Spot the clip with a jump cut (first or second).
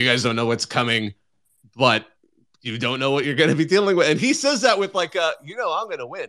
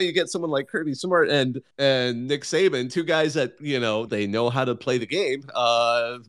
second